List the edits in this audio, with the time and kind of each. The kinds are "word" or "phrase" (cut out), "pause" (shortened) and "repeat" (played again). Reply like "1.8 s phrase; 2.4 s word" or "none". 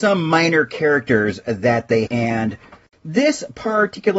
2.1 s word